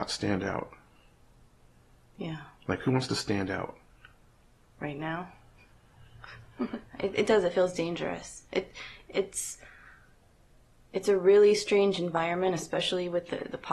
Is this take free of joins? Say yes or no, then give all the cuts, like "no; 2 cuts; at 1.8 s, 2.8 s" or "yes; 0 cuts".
yes; 0 cuts